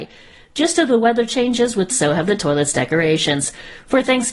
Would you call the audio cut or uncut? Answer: cut